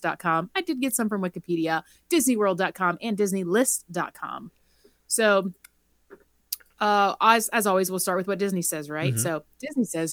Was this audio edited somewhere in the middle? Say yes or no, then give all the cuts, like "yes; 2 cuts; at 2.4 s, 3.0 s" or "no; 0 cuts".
no; 0 cuts